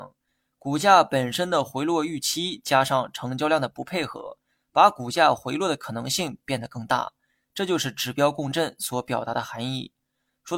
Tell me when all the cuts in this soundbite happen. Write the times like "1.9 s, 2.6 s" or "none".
none